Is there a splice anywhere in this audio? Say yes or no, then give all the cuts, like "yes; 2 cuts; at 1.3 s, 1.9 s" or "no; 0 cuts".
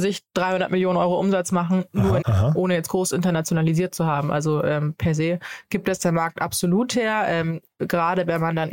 yes; 1 cut; at 2.2 s